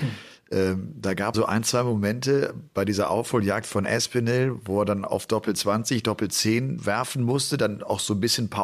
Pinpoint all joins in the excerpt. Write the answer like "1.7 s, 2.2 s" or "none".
1.3 s, 6.8 s